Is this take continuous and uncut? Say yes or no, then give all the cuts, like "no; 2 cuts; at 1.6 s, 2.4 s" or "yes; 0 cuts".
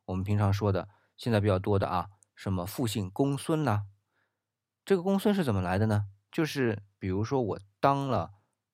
yes; 0 cuts